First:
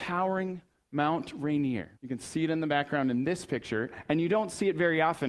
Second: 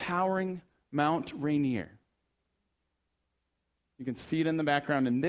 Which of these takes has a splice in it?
first; 1 cut; at 2.0 s

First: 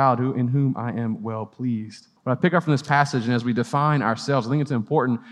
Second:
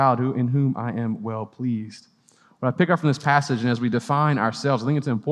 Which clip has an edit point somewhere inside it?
first; 1 cut; at 2.2 s

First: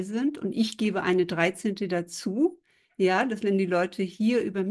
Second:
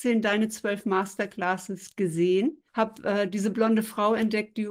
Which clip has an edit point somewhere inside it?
second; 1 cut; at 2.7 s

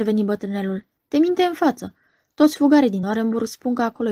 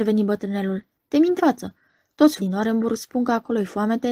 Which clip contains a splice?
second; 2 cuts; at 1.4 s, 2.4 s

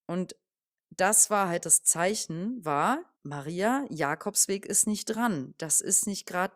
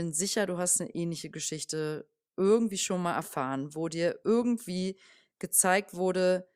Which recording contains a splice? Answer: first; 1 cut; at 3.2 s

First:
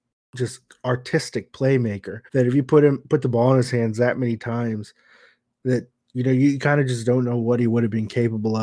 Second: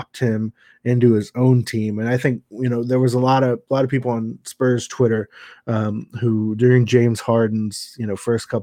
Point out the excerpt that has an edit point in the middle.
first; 1 cut; at 2.3 s

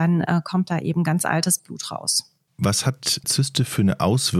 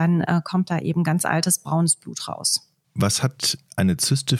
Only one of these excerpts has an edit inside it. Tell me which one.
first; 2 cuts; at 1.6 s, 3.2 s

